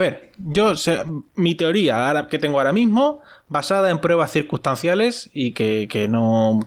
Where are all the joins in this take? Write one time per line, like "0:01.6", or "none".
none